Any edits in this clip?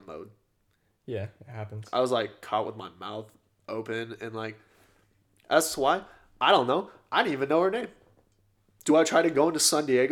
no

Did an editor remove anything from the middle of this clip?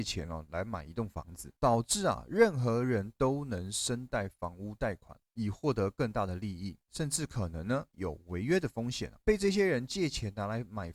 yes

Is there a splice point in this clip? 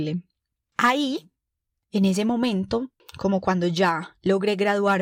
no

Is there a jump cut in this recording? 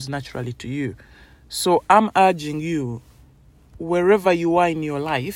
no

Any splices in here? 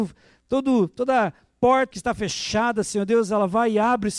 yes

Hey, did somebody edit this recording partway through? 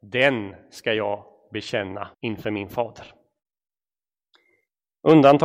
yes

